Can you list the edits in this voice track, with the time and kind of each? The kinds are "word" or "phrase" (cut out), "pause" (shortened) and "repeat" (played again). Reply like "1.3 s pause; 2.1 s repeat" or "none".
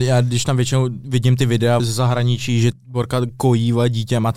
1.8 s word; 2.7 s phrase